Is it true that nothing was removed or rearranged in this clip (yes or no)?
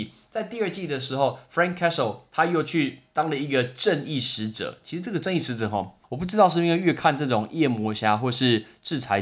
no